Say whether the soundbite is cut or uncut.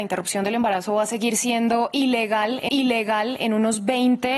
cut